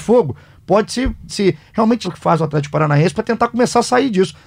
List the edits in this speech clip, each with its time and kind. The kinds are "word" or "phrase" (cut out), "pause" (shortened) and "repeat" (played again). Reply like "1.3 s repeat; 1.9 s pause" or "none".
1.3 s phrase; 2.0 s word